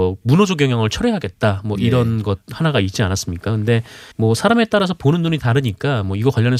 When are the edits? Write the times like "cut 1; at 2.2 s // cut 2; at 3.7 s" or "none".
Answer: cut 1; at 4.1 s